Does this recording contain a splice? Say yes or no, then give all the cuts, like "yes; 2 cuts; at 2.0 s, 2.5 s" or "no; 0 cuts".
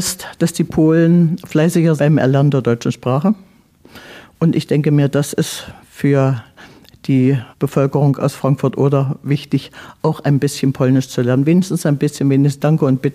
yes; 2 cuts; at 2.0 s, 7.5 s